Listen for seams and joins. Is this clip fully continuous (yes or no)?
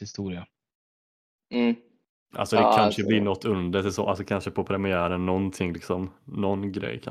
yes